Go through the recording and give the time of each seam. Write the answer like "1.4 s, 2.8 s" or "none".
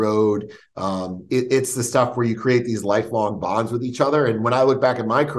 none